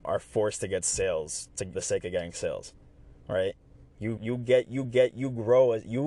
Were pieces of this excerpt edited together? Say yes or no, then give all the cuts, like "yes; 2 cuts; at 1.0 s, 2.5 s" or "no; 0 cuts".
yes; 4 cuts; at 1.7 s, 3.2 s, 4.2 s, 4.8 s